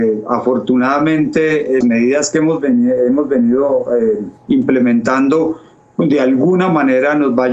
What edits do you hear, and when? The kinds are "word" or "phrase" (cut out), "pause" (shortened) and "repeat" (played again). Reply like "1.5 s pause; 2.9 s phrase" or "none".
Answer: 1.8 s word; 4.4 s pause

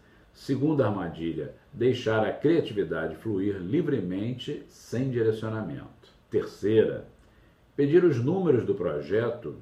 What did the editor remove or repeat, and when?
6.2 s pause

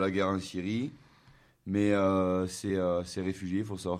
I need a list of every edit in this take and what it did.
none

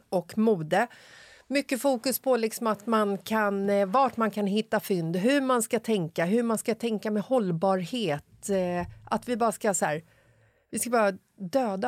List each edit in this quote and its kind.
none

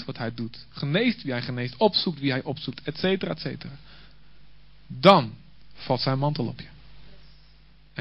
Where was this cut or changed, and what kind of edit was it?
none

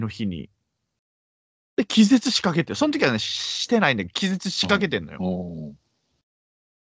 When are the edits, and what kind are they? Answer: none

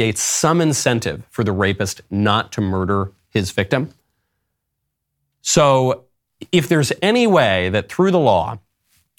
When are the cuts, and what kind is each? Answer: none

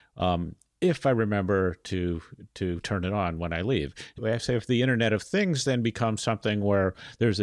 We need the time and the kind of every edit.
4.2 s word

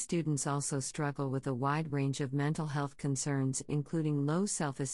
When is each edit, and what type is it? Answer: none

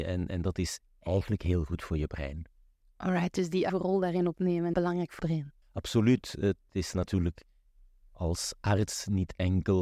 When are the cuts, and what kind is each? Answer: 3.7 s word; 4.7 s word; 5.2 s word; 5.6 s pause

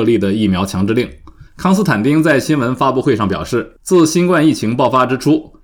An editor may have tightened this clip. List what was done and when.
1.5 s pause; 3.8 s pause

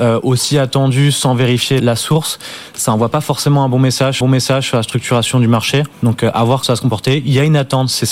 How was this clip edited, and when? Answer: 1.8 s word; 4.2 s repeat; 5.9 s pause; 6.6 s word

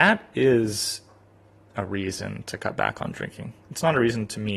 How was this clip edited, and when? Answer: none

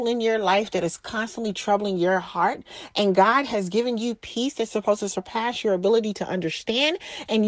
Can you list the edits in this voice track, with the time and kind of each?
none

